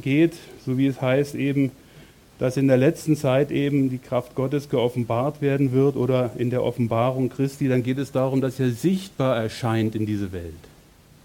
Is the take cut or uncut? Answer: uncut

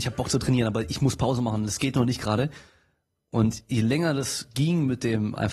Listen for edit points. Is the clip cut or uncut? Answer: uncut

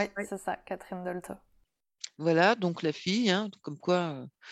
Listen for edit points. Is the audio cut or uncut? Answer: uncut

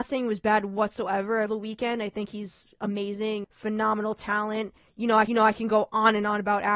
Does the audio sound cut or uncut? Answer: cut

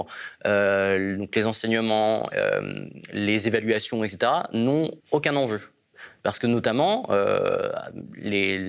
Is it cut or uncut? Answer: cut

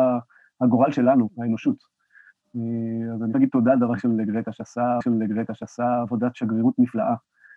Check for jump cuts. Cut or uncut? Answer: cut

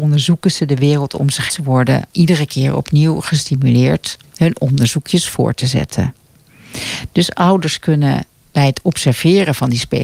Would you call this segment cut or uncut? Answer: cut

